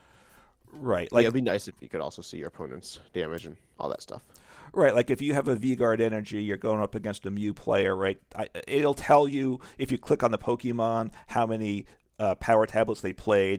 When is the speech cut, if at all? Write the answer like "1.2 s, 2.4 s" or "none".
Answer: none